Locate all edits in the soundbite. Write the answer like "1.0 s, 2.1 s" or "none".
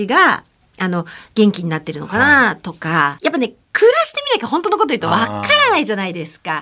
3.2 s